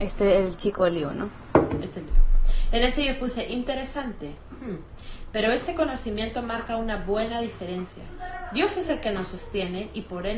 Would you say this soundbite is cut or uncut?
uncut